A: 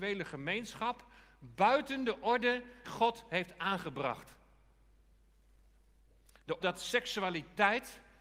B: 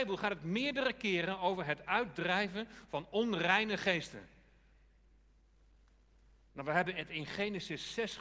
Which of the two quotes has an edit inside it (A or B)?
A